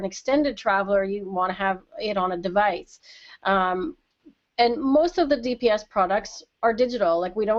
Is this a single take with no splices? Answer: yes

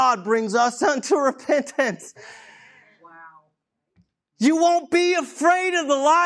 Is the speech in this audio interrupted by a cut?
no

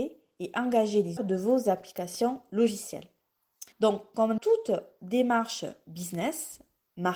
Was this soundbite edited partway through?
yes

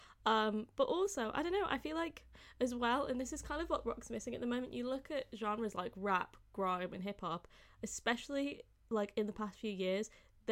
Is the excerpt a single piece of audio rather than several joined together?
yes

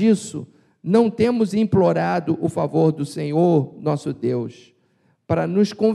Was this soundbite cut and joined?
no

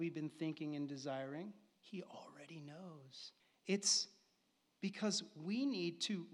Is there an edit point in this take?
yes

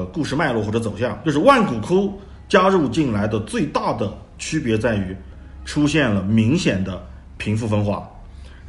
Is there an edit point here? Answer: yes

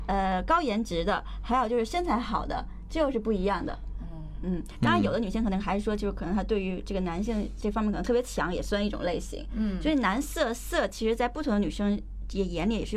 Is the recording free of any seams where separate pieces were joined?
no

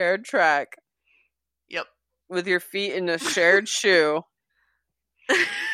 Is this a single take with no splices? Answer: yes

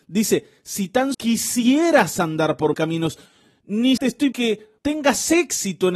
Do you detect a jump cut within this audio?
yes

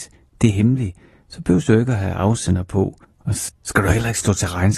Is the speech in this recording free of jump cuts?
no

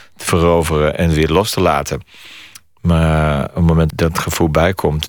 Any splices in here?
yes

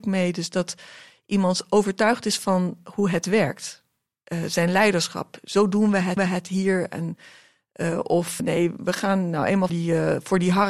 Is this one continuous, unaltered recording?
no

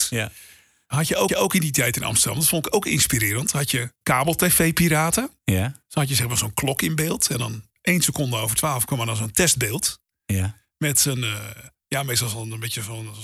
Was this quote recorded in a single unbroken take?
no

